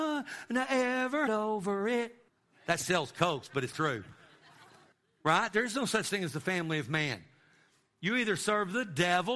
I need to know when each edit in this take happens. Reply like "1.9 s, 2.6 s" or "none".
1.3 s, 2.3 s, 3.7 s, 4.9 s